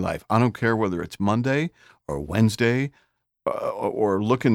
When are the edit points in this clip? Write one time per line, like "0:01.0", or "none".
none